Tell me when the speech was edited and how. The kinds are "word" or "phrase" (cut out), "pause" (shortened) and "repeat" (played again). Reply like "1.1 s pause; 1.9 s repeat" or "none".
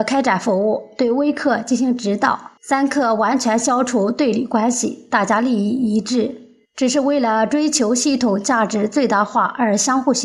2.6 s pause; 6.7 s pause